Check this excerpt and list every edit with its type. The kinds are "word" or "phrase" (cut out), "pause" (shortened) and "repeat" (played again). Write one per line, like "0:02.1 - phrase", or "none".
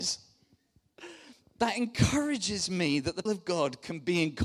0:03.3 - word